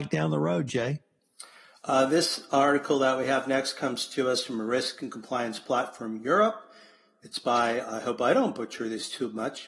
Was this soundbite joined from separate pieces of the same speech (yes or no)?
no